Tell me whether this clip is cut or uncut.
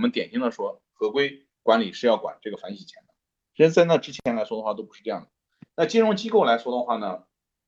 uncut